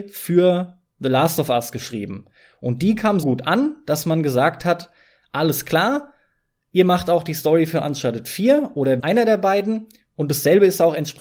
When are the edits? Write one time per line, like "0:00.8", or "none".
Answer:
0:03.2
0:09.0